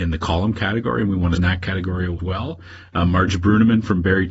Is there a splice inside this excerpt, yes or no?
yes